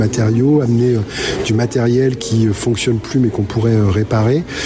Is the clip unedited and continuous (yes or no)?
yes